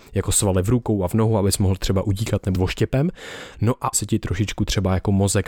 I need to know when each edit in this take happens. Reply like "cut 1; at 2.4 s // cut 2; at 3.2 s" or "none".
cut 1; at 2.5 s // cut 2; at 3.9 s